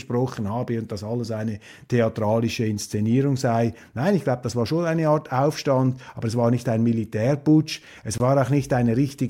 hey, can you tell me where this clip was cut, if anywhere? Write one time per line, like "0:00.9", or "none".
none